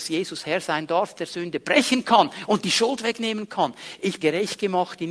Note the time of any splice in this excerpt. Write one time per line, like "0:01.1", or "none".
0:01.2
0:04.2